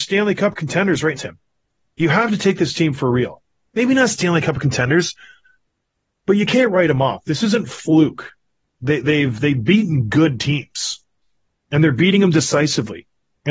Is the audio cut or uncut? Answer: cut